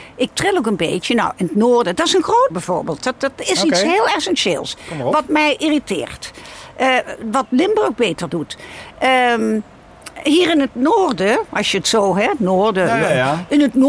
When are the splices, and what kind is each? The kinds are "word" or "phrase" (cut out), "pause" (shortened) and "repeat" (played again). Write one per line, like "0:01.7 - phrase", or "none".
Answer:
0:02.5 - word
0:11.5 - pause